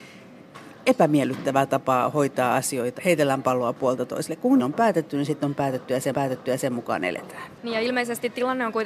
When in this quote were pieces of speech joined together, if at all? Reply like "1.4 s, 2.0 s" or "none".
3.0 s, 4.6 s, 6.1 s, 7.6 s